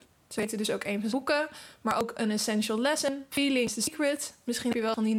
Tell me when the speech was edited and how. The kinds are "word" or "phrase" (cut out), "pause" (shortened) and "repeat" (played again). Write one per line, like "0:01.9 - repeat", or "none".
0:01.1 - word

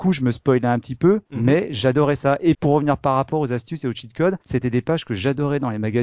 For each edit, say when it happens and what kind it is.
0:01.3 - pause
0:02.5 - word
0:04.4 - pause

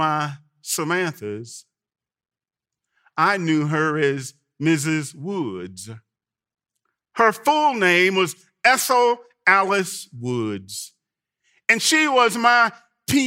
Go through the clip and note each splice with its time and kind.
none

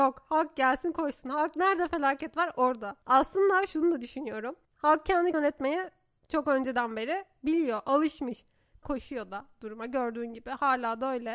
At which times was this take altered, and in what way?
0:03.0 - pause
0:04.6 - pause
0:05.3 - word
0:08.8 - phrase

